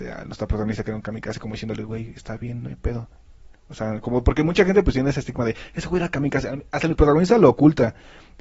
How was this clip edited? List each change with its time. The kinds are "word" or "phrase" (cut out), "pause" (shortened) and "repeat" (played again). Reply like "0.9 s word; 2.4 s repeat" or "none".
none